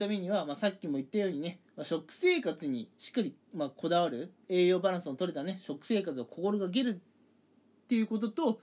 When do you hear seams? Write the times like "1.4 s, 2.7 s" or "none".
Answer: 4.4 s

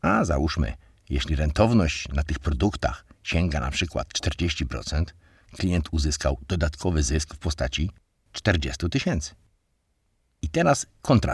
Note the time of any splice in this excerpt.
none

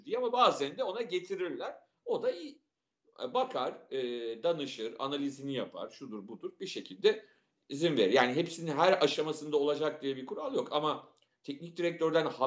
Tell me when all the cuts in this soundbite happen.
none

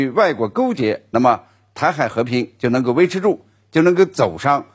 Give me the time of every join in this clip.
none

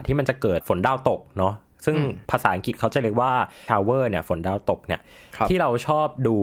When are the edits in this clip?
2.2 s, 3.7 s

